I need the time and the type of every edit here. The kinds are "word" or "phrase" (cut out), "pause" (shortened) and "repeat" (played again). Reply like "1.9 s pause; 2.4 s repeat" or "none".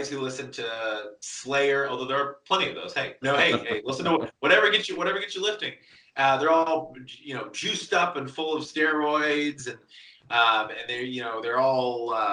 3.2 s word